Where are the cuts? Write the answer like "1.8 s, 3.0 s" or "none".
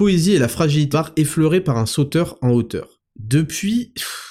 0.9 s, 3.1 s